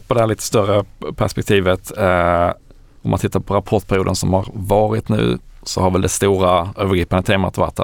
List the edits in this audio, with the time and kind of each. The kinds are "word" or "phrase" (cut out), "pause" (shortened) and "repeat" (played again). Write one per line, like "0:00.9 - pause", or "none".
none